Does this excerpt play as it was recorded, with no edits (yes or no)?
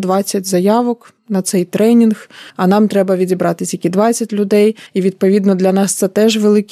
no